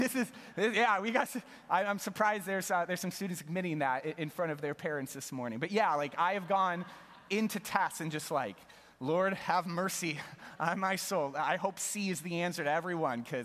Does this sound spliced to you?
no; 0 cuts

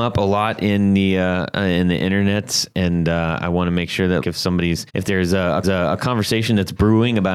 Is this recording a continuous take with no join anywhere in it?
no; 3 cuts; at 4.2 s, 4.9 s, 5.6 s

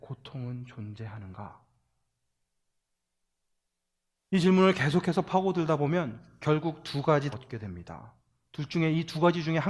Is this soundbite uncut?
no; 1 cut; at 7.3 s

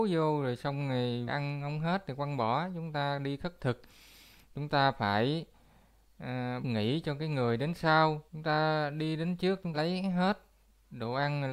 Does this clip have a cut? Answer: yes; 4 cuts; at 1.3 s, 6.6 s, 8.3 s, 9.7 s

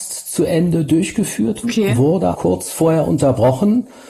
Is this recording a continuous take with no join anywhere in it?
no; 2 cuts; at 1.6 s, 2.3 s

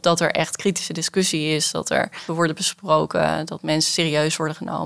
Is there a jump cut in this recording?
yes; 1 cut; at 2.3 s

